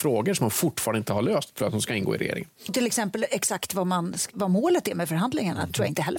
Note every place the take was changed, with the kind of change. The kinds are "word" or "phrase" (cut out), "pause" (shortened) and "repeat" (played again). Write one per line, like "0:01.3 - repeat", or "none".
0:01.6 - word
0:02.7 - word